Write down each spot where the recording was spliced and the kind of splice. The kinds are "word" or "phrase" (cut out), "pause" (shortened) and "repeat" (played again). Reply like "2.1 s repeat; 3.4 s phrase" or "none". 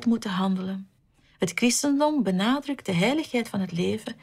none